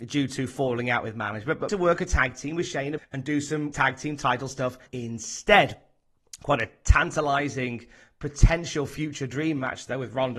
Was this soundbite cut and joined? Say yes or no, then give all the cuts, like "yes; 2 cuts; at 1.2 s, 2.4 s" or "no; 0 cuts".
yes; 4 cuts; at 1.7 s, 3.0 s, 3.7 s, 4.9 s